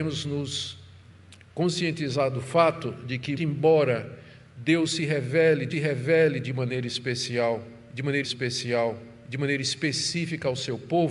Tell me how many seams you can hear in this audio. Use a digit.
3